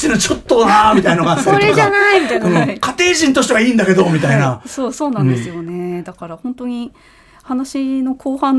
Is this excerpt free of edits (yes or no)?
yes